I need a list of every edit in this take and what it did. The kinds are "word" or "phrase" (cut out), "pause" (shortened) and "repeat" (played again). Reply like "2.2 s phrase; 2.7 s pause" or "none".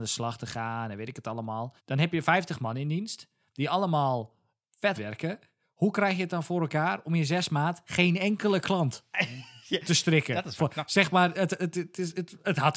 1.8 s pause; 4.9 s word